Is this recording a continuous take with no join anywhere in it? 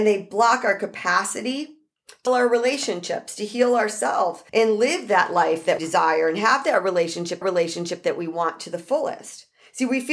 no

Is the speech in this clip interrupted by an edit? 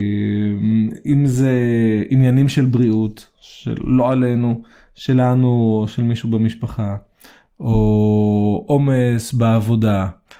no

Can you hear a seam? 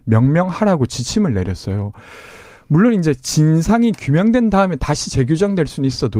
no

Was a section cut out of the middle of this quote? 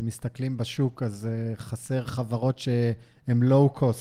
no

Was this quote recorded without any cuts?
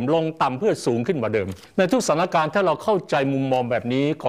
no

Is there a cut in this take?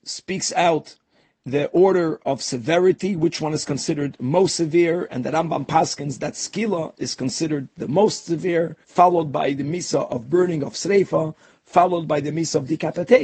yes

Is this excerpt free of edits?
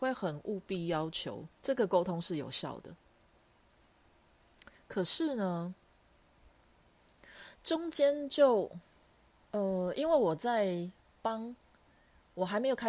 no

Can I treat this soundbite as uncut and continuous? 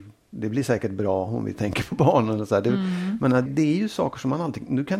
no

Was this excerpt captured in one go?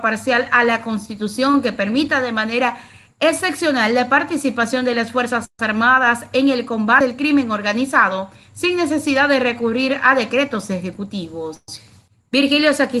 yes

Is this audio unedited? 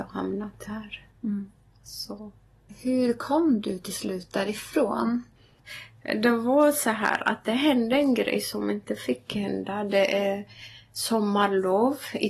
yes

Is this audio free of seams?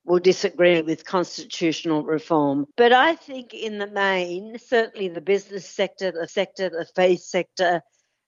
no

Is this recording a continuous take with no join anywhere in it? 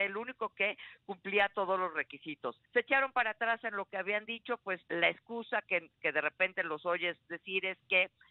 no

